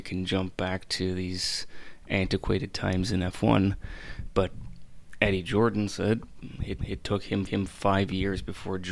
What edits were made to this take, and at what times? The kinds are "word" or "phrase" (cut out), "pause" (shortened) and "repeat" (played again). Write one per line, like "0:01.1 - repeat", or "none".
0:06.8 - repeat
0:07.5 - repeat